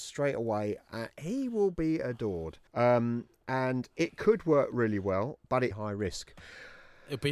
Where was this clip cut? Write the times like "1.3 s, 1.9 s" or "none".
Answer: 2.7 s, 5.7 s